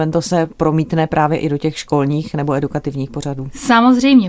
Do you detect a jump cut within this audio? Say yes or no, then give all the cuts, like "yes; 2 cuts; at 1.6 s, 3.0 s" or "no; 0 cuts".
no; 0 cuts